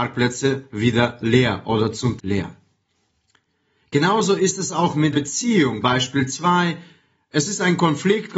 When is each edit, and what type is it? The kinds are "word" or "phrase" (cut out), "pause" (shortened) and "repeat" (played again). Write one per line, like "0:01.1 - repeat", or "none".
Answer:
0:02.2 - word
0:05.1 - word
0:05.8 - word